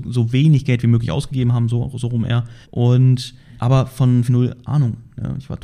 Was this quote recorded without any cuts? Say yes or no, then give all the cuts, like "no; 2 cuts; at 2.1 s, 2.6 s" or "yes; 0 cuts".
no; 2 cuts; at 2.6 s, 4.3 s